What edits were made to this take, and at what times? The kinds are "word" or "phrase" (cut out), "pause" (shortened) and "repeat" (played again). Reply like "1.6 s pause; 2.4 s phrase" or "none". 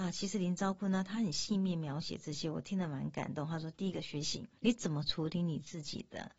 4.6 s pause